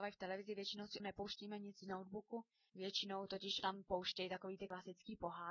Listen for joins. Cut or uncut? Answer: cut